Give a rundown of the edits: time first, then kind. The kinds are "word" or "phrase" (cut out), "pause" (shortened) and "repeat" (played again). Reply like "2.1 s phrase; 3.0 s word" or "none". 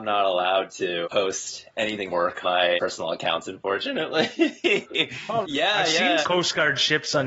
1.0 s word; 2.1 s word; 2.4 s word; 2.8 s word; 5.4 s word; 6.2 s word